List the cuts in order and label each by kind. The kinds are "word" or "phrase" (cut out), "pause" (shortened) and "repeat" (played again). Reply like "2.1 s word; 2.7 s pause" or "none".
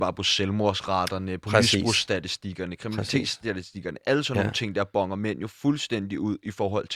none